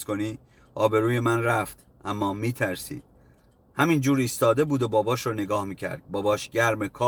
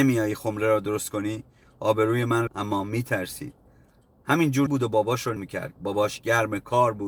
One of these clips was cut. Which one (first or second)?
second